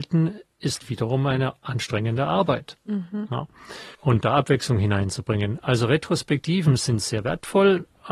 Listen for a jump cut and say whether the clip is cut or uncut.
cut